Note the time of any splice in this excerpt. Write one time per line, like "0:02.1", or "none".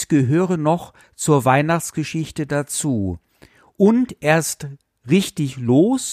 none